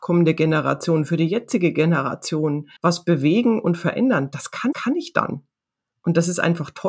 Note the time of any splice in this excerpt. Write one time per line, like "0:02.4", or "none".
0:02.8
0:04.7